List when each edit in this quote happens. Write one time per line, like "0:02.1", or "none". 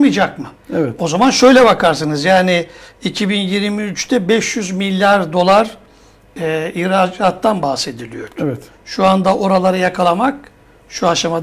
none